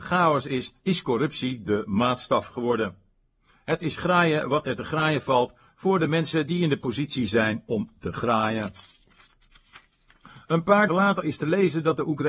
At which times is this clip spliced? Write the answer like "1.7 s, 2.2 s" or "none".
10.9 s